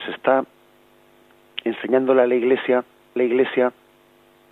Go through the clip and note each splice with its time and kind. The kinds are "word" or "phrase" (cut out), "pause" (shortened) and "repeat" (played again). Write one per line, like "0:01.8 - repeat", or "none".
0:03.2 - repeat